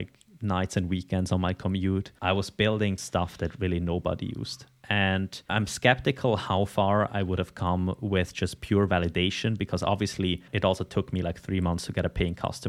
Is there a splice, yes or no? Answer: yes